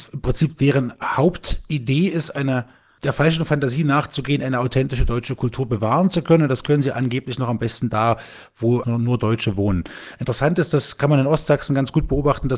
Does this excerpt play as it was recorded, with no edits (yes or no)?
no